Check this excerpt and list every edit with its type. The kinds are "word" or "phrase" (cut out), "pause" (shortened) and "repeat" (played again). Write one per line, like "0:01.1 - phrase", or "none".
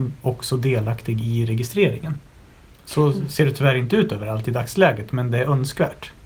none